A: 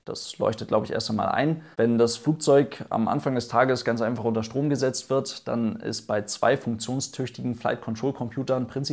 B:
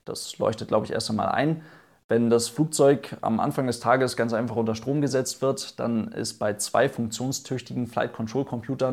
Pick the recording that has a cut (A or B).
A